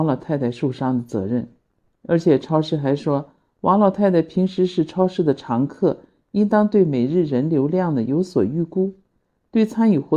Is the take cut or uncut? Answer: uncut